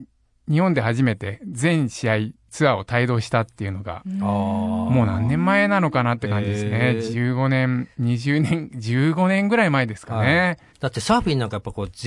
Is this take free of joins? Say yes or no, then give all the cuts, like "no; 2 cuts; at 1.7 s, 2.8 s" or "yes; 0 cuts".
no; 2 cuts; at 7.9 s, 10.7 s